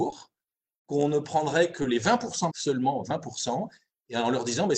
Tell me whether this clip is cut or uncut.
cut